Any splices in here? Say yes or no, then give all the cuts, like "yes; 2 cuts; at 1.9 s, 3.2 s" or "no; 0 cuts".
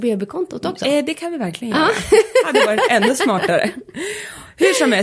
no; 0 cuts